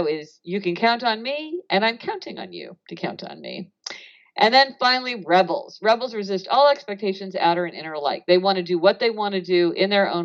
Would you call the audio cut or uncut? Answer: uncut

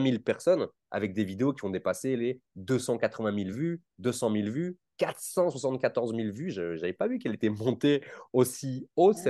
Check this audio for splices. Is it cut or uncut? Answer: uncut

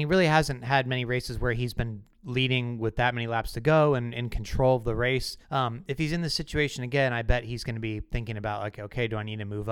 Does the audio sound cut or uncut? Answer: cut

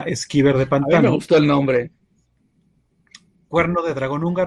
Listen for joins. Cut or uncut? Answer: uncut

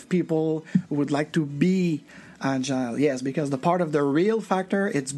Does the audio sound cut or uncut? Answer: uncut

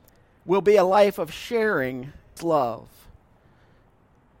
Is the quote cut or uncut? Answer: cut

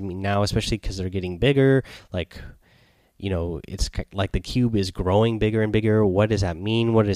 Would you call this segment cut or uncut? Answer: uncut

